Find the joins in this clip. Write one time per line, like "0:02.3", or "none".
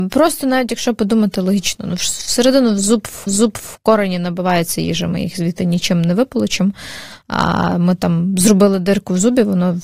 0:03.3